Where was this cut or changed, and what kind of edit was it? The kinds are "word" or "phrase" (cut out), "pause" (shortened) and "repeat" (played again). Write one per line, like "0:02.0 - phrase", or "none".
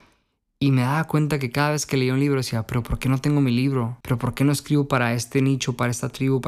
0:04.0 - pause